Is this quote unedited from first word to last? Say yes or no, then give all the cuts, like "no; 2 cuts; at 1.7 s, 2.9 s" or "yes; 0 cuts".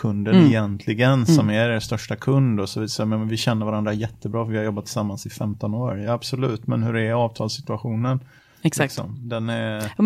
yes; 0 cuts